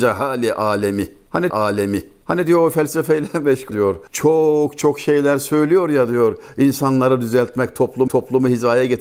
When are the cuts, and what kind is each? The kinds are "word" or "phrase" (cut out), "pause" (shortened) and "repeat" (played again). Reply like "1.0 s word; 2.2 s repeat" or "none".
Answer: 1.5 s repeat; 3.7 s phrase; 4.1 s pause; 8.1 s repeat